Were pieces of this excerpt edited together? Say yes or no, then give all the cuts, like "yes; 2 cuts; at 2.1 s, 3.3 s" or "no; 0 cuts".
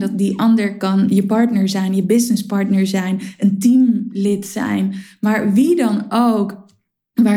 no; 0 cuts